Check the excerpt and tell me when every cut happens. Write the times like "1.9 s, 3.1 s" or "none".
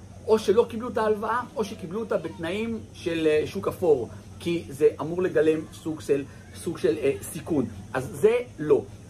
none